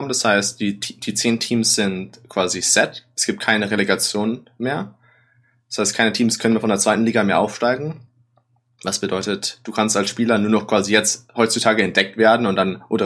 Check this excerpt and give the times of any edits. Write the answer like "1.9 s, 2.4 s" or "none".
none